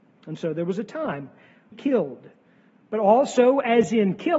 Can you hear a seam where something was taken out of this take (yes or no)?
yes